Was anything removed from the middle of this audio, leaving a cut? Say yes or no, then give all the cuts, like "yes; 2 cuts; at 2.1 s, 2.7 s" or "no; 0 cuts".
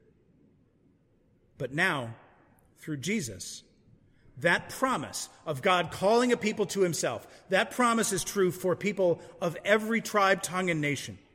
no; 0 cuts